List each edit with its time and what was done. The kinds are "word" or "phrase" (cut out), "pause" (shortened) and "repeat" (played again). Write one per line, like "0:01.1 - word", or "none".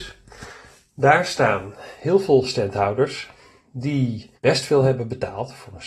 0:04.3 - pause